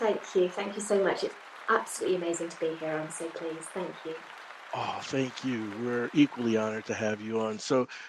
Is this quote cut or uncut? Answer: uncut